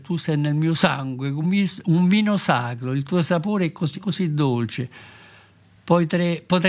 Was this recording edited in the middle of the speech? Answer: yes; 2 cuts; at 1.4 s, 3.9 s

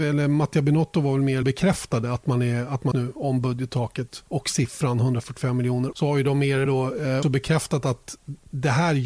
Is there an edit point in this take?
yes; 6 cuts; at 1.4 s, 2.9 s, 4.3 s, 5.9 s, 6.7 s, 7.2 s

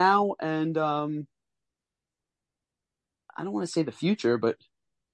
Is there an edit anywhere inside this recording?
no; 0 cuts

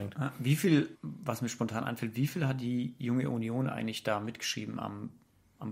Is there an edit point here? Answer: yes; 1 cut; at 0.9 s

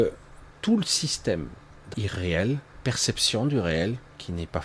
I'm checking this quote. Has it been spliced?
yes; 1 cut; at 1.9 s

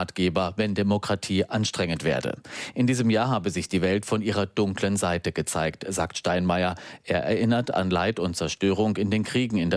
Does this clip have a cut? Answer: no; 0 cuts

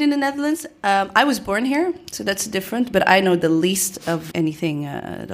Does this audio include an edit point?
yes; 1 cut; at 4.3 s

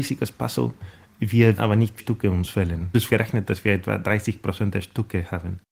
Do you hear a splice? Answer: yes; 3 cuts; at 1.6 s, 2.0 s, 3.1 s

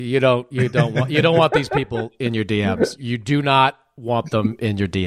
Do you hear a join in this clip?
no; 0 cuts

